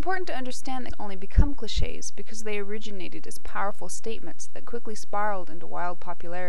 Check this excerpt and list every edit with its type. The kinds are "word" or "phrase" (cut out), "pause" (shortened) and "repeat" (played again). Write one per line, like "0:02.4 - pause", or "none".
0:00.9 - word